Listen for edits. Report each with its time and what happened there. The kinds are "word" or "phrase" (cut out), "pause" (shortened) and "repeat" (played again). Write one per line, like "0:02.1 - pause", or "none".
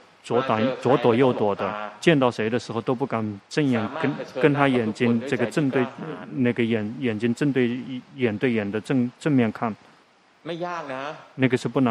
0:10.0 - pause